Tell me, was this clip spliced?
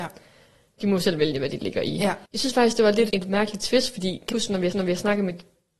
yes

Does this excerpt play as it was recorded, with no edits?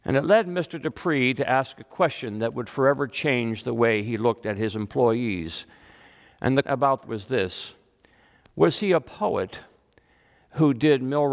no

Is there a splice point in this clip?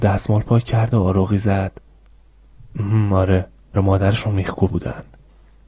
yes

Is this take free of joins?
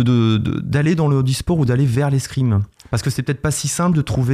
yes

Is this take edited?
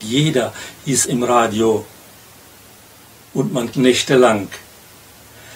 yes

